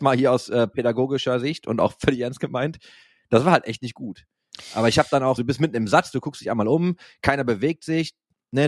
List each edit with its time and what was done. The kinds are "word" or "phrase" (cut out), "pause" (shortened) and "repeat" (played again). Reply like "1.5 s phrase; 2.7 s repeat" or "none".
5.4 s word